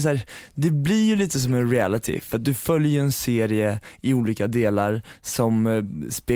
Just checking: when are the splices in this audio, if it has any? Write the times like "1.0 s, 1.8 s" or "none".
none